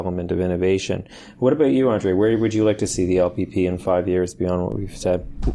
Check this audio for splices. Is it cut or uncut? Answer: uncut